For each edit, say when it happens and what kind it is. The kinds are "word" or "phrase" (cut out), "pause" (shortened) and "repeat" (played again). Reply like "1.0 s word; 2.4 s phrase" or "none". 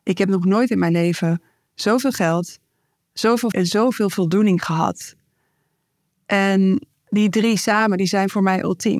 3.5 s word